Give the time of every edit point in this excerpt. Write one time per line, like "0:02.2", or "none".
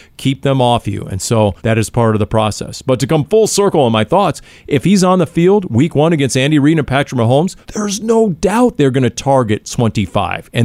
0:01.6
0:07.6